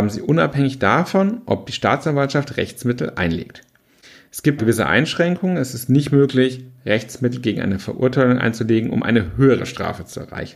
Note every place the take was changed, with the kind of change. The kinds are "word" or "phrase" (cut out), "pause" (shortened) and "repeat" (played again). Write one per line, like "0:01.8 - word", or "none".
0:04.6 - word